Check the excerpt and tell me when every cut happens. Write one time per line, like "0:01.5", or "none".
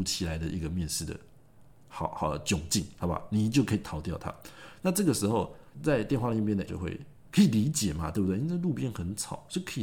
0:05.7
0:06.7